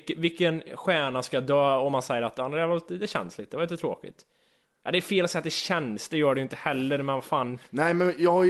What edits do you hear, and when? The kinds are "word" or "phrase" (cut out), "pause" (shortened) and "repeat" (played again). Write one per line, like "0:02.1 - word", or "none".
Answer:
none